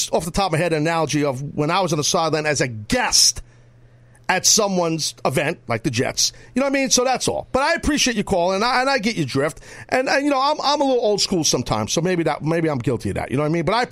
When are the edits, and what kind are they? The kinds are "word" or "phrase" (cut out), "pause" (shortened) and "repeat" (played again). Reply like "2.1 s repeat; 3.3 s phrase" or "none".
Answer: none